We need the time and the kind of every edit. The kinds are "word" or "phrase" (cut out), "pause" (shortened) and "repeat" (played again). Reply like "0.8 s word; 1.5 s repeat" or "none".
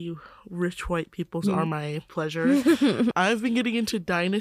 1.4 s word; 2.1 s word; 3.1 s word